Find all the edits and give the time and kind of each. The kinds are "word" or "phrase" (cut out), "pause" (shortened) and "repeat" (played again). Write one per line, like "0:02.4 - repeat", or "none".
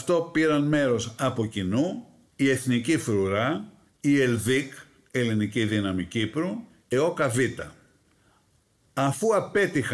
0:06.9 - word